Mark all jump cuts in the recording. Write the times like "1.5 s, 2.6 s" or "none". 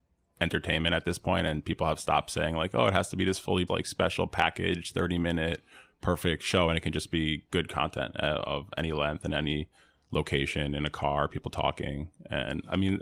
3.7 s